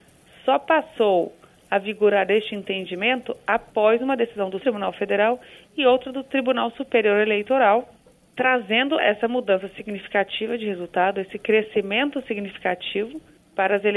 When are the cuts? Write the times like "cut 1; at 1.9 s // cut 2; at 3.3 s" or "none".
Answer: cut 1; at 4.6 s // cut 2; at 9.0 s